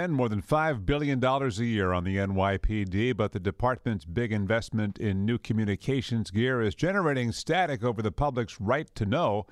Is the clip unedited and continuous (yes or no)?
yes